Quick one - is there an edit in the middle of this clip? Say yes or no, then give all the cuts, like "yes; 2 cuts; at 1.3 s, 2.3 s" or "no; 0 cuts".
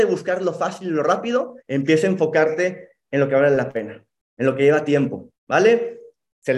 yes; 2 cuts; at 1.6 s, 5.3 s